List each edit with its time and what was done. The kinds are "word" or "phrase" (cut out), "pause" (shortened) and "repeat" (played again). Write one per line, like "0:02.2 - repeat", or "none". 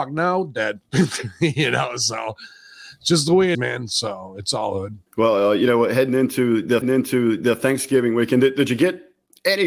0:03.5 - word
0:05.1 - pause
0:06.8 - repeat